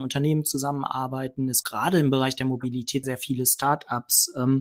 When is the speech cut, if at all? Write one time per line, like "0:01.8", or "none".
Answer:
0:01.6
0:03.0